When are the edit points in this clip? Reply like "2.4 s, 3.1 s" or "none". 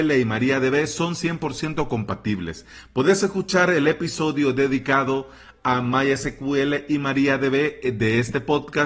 none